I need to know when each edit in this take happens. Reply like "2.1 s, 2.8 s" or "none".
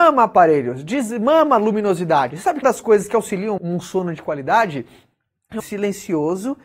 2.6 s, 3.6 s, 5.6 s

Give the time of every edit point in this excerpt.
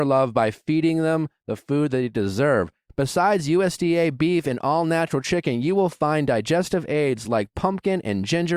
none

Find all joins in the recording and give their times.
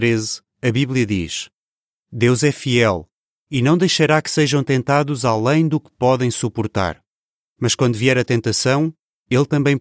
none

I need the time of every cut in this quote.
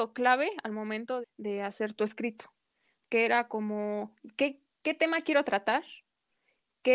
1.2 s

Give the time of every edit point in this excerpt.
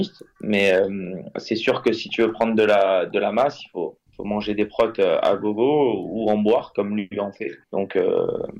4.1 s, 7.6 s

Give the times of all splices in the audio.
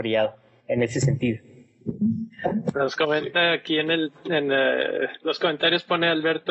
none

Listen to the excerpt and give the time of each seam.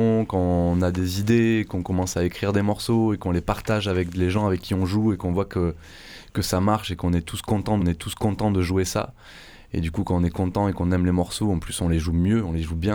7.8 s

